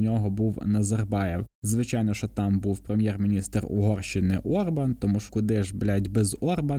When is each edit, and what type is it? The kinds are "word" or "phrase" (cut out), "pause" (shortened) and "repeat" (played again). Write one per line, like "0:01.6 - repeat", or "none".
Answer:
0:01.5 - pause
0:05.3 - word